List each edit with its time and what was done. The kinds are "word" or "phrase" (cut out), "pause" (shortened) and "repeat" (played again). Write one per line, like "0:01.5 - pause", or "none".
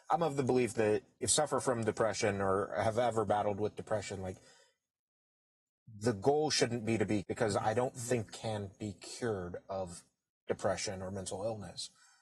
0:01.3 - word
0:07.2 - word
0:08.3 - word